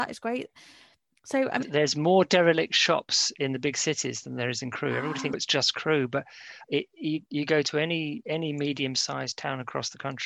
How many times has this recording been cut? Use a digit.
3